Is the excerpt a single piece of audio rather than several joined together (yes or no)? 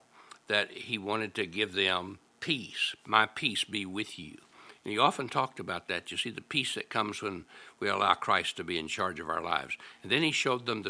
no